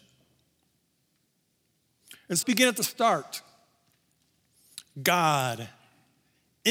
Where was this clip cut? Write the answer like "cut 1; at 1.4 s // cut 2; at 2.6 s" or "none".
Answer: cut 1; at 2.4 s